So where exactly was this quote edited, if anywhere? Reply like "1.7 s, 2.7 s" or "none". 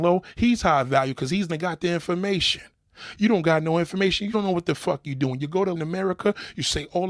1.5 s, 4.3 s, 5.7 s